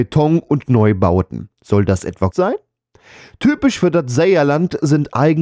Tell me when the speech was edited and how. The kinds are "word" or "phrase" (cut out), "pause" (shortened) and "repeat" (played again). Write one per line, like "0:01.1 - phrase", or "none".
0:01.5 - pause
0:02.3 - word